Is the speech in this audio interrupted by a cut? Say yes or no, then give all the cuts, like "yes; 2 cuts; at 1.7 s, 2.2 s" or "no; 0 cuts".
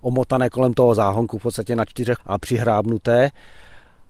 yes; 1 cut; at 2.2 s